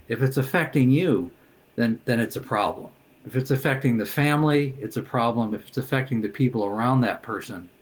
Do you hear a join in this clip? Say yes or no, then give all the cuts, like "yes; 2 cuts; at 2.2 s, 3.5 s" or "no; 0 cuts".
no; 0 cuts